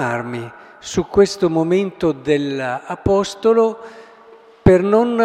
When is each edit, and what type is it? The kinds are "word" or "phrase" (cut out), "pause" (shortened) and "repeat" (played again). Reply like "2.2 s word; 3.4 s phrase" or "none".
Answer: none